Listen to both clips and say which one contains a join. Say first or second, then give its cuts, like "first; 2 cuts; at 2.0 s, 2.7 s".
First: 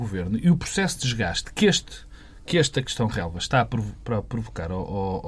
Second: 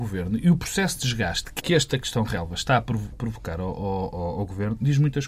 second; 2 cuts; at 1.6 s, 3.1 s